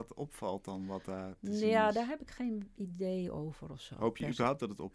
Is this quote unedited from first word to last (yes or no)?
yes